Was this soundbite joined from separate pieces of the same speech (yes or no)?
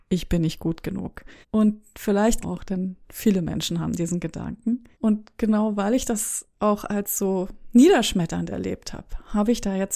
yes